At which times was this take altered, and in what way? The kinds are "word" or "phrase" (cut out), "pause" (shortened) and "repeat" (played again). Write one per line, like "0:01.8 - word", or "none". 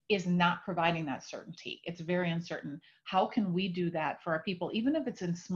none